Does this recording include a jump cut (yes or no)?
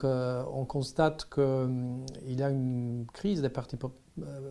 no